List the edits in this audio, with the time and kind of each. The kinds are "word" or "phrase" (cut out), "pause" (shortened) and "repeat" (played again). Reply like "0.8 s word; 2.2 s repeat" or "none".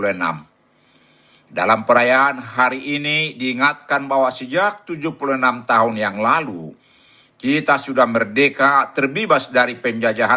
none